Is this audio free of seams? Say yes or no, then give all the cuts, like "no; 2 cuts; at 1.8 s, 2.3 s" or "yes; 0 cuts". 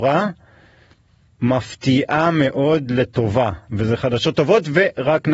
yes; 0 cuts